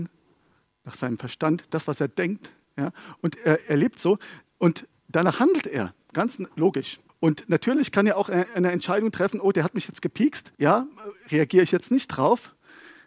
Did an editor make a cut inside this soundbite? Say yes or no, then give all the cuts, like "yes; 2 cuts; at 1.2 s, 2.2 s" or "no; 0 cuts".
yes; 2 cuts; at 7.1 s, 10.5 s